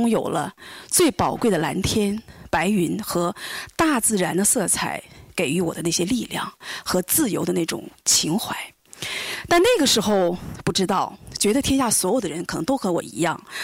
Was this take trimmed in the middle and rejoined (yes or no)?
no